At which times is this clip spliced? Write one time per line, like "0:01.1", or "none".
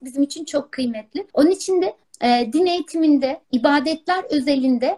0:01.3
0:02.0
0:03.4